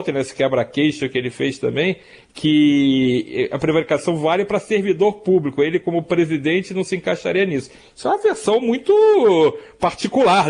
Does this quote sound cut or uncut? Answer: uncut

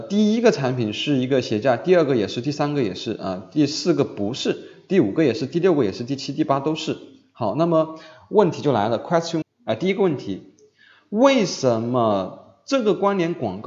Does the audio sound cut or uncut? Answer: cut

